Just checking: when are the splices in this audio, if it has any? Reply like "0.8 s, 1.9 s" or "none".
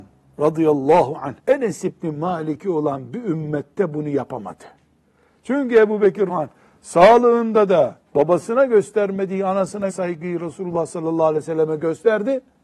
1.4 s, 6.3 s, 8.1 s, 9.9 s